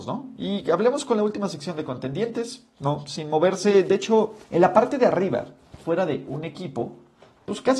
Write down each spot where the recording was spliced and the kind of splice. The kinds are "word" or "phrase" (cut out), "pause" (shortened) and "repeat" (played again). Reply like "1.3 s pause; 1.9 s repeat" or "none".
4.4 s pause